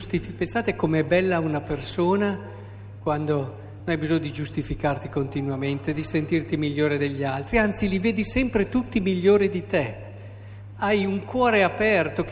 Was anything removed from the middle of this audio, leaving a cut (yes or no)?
no